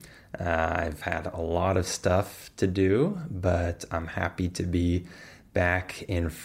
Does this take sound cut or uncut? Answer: uncut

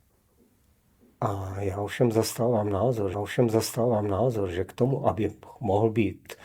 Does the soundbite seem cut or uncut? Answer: cut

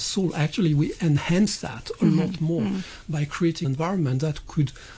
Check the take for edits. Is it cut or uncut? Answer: cut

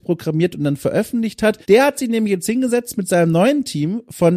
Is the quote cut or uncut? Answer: cut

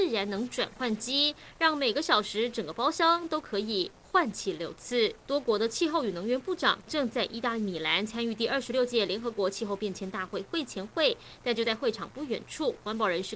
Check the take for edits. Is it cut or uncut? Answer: cut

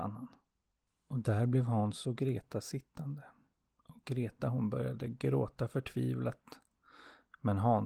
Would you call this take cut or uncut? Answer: uncut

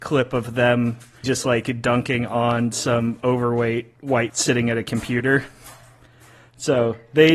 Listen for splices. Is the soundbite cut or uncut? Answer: cut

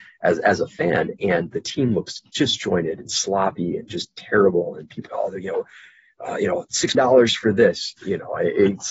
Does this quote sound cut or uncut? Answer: cut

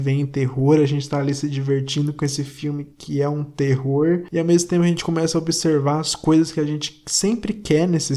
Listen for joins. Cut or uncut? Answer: uncut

